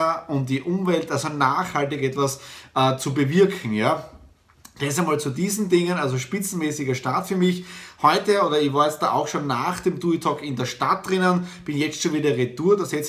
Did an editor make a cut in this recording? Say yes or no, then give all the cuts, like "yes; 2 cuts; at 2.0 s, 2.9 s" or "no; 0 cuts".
no; 0 cuts